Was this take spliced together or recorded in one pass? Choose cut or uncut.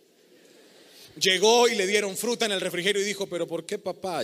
uncut